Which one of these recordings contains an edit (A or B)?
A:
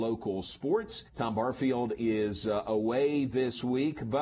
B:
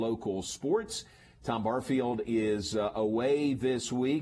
A